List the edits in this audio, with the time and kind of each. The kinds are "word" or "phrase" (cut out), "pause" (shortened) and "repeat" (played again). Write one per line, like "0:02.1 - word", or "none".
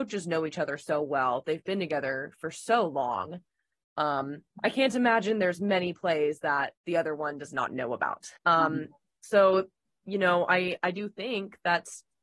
0:04.5 - pause
0:06.8 - pause
0:08.4 - pause
0:09.8 - pause